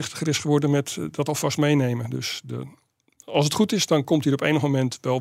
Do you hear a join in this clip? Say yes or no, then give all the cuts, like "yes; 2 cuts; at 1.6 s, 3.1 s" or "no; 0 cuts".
no; 0 cuts